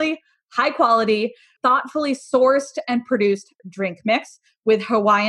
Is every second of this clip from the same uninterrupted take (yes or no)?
no